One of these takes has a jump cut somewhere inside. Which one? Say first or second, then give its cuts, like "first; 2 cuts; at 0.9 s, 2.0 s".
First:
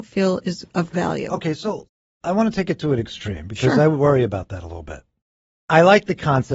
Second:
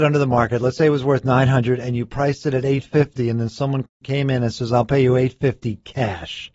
first; 1 cut; at 0.9 s